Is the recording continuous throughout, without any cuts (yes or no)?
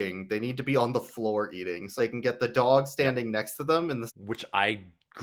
no